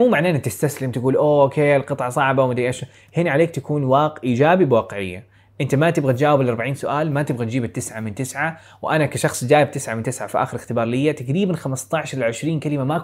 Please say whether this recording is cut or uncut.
uncut